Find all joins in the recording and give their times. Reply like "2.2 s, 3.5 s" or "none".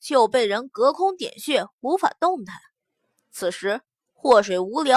none